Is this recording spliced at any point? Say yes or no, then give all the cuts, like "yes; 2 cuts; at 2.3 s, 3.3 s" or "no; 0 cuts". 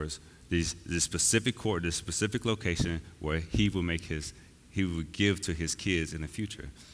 no; 0 cuts